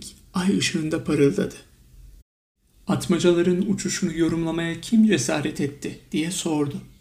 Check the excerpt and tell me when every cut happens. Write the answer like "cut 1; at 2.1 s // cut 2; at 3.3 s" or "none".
none